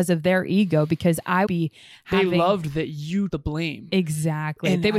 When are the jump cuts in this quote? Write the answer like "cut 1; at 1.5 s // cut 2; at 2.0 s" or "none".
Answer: cut 1; at 1.5 s // cut 2; at 3.3 s